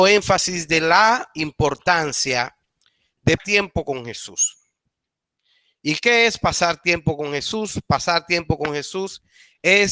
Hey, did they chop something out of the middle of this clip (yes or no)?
yes